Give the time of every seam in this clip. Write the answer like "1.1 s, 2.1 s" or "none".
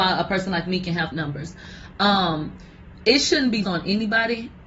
1.1 s, 3.6 s